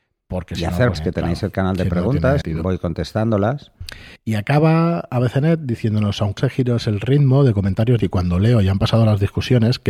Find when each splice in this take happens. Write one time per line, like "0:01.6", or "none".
0:01.0
0:02.4
0:04.2
0:06.4
0:08.0